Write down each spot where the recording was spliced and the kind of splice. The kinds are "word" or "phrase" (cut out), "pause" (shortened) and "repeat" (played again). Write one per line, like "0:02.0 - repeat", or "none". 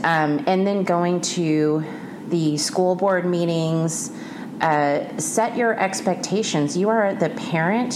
none